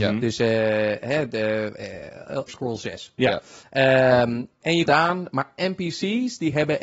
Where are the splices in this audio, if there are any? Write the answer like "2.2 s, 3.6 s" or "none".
2.5 s, 4.9 s, 5.6 s